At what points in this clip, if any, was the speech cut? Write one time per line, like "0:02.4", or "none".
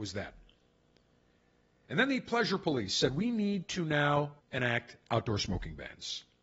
0:04.4